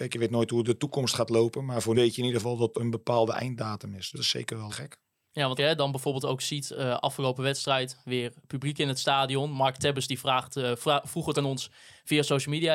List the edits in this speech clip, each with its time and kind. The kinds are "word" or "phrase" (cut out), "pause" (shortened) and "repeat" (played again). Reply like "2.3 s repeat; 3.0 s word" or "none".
1.9 s word; 2.7 s word; 4.1 s word; 4.7 s word; 5.6 s word; 11.3 s word